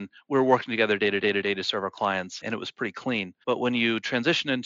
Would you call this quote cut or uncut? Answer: cut